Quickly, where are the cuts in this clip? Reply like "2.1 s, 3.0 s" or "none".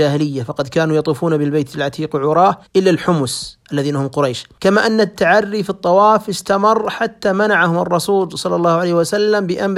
2.7 s, 3.6 s, 4.6 s